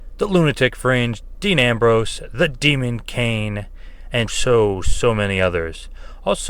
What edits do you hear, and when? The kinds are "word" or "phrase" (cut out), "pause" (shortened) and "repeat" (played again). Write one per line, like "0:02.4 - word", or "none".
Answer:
0:04.3 - word